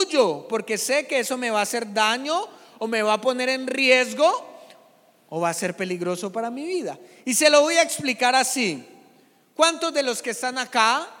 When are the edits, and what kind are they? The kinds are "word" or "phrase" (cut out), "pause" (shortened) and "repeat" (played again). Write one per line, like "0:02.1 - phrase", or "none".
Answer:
none